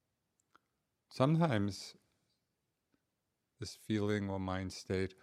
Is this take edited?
no; 0 cuts

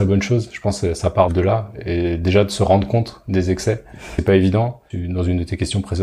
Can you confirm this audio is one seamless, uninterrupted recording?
no; 1 cut; at 1.3 s

